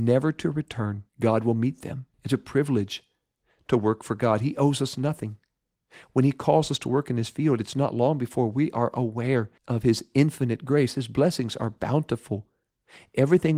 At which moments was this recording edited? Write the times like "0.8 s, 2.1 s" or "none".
1.1 s, 2.1 s, 9.6 s